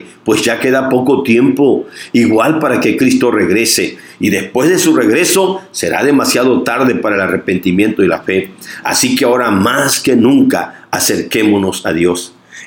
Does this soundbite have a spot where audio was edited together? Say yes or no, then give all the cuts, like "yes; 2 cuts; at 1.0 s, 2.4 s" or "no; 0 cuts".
no; 0 cuts